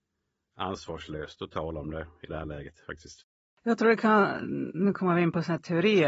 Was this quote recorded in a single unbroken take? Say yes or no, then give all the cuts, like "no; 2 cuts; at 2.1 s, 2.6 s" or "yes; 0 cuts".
yes; 0 cuts